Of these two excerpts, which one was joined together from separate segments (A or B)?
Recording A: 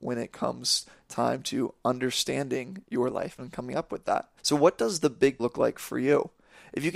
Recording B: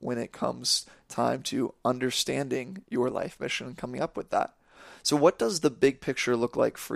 A